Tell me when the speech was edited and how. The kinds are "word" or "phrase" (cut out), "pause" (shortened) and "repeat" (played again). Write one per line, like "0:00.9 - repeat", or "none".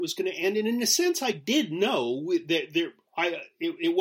none